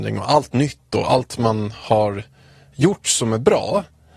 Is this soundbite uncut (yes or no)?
yes